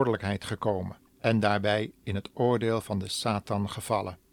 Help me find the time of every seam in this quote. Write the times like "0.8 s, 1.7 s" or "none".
1.1 s